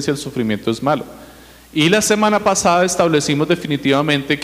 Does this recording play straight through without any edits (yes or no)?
yes